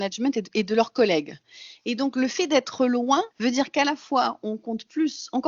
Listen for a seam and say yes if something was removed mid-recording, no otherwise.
yes